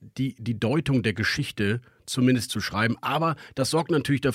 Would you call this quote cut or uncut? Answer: cut